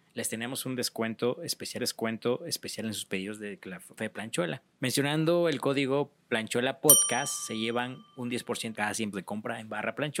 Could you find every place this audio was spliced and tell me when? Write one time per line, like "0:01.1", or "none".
0:01.8
0:04.0
0:04.7
0:06.2
0:08.7
0:09.1

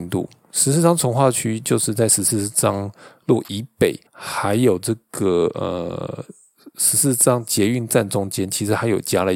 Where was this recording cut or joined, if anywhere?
0:04.1

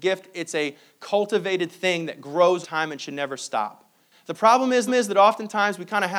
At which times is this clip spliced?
0:02.6
0:04.9

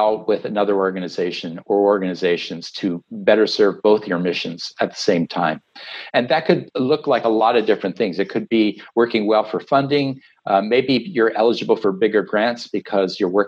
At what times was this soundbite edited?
none

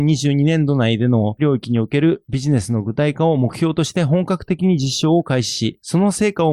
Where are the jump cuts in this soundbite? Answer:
0:01.4

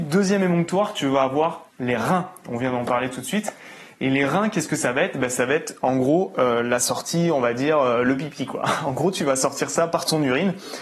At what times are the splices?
0:01.7

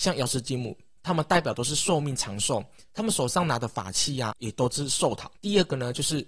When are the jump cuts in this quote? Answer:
0:04.3
0:05.3

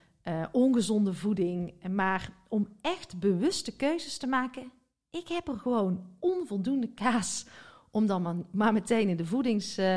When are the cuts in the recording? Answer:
none

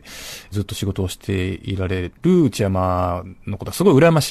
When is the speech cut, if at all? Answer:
0:02.2

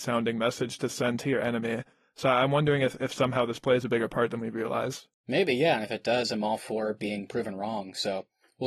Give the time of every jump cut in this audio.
0:05.1

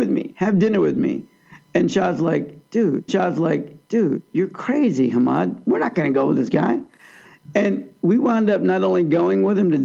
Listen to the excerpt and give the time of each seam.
0:03.1

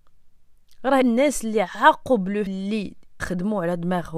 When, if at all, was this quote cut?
0:01.0
0:02.5
0:03.2

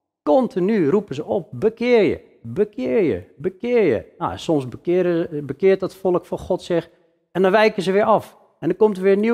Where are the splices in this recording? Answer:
none

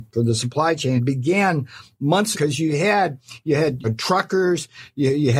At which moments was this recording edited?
0:01.0
0:02.3
0:03.8

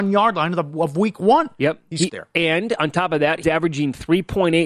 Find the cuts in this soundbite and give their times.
0:02.1
0:03.4

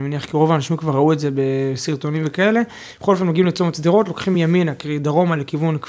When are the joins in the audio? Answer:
none

